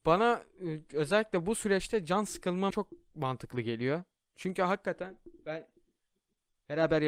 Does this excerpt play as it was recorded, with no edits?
no; 1 cut; at 2.7 s

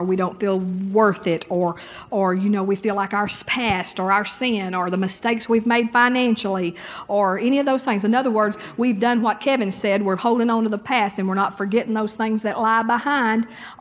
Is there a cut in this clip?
no; 0 cuts

